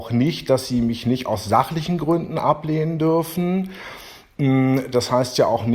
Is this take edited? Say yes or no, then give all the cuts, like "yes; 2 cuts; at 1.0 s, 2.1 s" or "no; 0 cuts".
no; 0 cuts